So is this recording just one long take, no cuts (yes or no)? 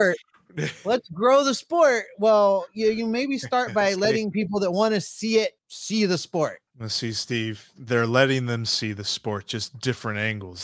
no